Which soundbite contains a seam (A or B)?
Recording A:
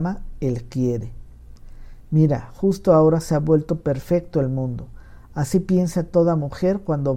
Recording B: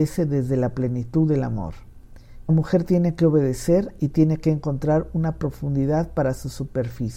B